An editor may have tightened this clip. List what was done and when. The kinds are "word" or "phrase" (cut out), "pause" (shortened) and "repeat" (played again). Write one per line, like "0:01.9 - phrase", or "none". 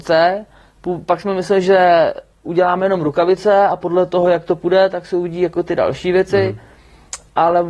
none